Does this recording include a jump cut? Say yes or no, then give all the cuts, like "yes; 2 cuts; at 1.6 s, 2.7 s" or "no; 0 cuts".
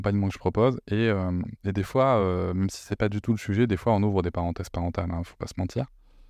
no; 0 cuts